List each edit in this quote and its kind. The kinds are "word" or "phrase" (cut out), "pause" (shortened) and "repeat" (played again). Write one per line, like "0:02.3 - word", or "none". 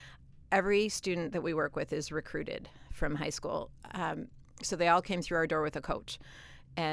none